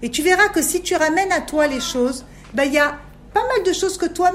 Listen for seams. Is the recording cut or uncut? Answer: uncut